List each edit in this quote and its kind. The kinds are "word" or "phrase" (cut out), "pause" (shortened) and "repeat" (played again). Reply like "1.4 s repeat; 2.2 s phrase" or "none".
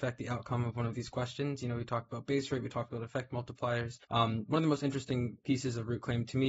4.0 s pause